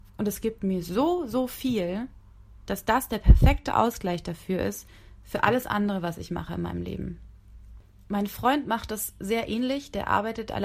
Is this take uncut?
yes; 0 cuts

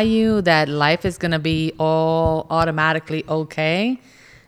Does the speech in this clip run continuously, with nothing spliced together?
yes; 0 cuts

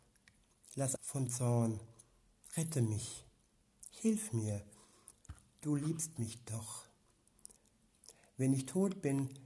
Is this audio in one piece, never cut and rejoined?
no; 2 cuts; at 1.0 s, 1.3 s

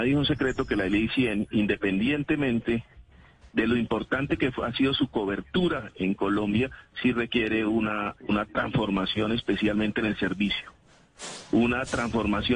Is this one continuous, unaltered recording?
yes; 0 cuts

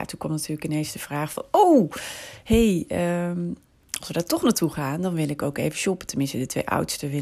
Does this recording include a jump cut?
no; 0 cuts

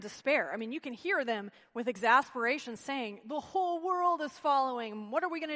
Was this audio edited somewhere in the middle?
no; 0 cuts

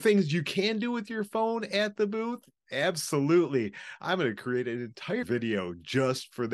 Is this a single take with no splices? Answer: no; 1 cut; at 5.2 s

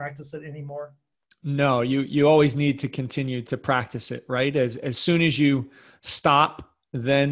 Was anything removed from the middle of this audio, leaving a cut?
no; 0 cuts

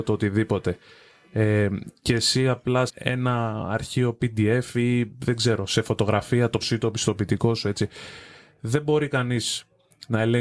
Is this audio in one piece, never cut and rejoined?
no; 2 cuts; at 2.9 s, 6.6 s

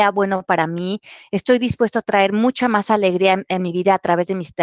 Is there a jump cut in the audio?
no; 0 cuts

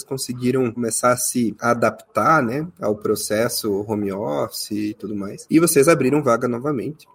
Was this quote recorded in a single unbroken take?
yes; 0 cuts

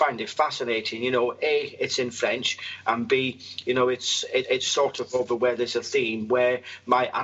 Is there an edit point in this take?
yes; 2 cuts; at 4.4 s, 5.1 s

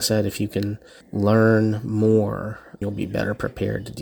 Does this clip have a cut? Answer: yes; 2 cuts; at 1.0 s, 2.8 s

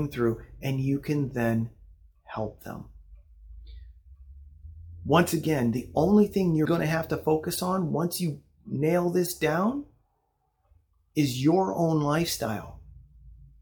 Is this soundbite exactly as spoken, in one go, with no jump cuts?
no; 1 cut; at 6.7 s

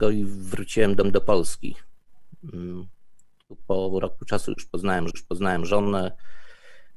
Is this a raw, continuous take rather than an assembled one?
no; 2 cuts; at 1.0 s, 5.1 s

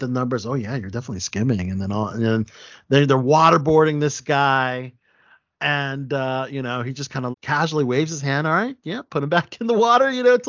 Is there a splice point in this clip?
yes; 1 cut; at 7.3 s

